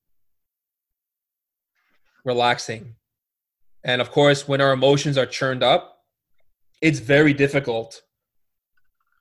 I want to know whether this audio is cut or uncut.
uncut